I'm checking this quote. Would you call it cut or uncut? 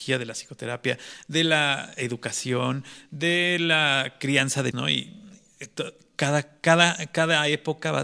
cut